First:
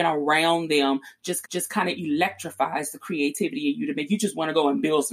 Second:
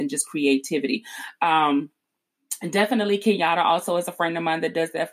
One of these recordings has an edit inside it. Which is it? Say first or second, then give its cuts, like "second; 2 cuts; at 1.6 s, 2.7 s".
first; 1 cut; at 1.4 s